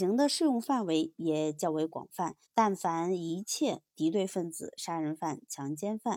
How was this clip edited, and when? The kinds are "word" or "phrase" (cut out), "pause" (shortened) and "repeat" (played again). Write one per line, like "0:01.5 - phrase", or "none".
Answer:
0:02.4 - pause